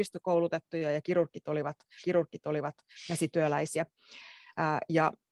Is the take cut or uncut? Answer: cut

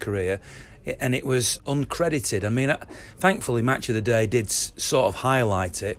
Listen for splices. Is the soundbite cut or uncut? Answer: cut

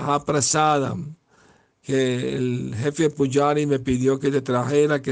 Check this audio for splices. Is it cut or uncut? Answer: uncut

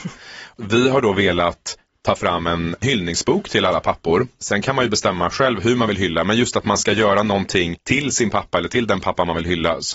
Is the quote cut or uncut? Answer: uncut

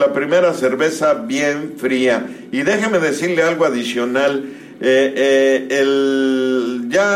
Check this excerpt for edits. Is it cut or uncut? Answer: uncut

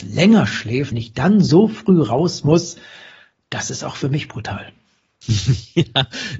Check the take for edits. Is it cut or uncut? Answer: cut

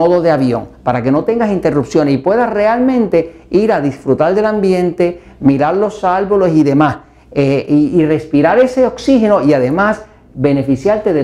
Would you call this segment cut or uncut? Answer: uncut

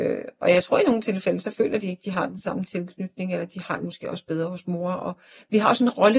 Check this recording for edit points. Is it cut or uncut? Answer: uncut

